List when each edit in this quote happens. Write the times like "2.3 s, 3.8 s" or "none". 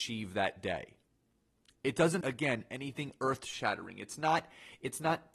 2.2 s